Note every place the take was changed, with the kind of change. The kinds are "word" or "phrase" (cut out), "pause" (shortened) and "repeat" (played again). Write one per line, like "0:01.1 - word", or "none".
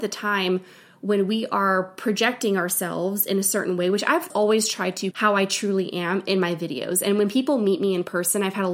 0:04.3 - word
0:05.1 - word